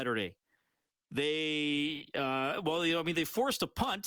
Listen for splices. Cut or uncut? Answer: cut